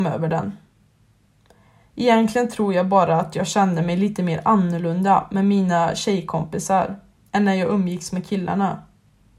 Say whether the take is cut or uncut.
cut